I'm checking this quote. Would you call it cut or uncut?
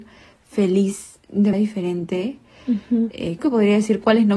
cut